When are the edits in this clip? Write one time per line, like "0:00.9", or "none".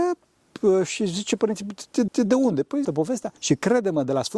0:02.1
0:02.8
0:03.4